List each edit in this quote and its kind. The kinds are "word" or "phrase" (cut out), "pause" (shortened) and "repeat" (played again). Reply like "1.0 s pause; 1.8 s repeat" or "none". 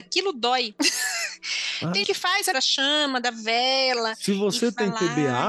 2.0 s word; 2.5 s phrase